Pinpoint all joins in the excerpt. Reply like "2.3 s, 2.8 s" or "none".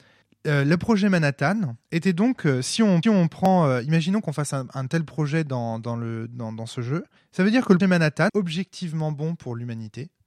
1.8 s, 3.0 s, 7.2 s, 7.8 s, 8.3 s